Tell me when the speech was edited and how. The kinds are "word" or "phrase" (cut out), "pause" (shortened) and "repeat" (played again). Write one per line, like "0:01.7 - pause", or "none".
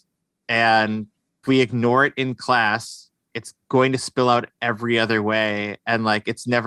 0:01.4 - word
0:03.6 - pause